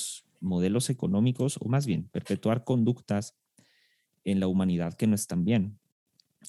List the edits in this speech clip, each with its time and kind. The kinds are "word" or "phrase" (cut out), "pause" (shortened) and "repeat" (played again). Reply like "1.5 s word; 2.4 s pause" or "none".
none